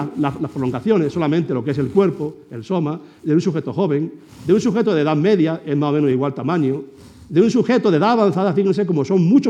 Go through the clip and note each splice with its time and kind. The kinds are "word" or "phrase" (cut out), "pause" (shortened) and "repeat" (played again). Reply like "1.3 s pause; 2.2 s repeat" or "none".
6.1 s word